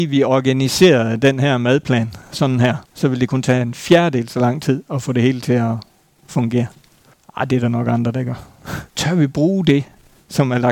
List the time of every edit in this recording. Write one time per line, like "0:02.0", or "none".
0:02.8
0:07.1
0:08.9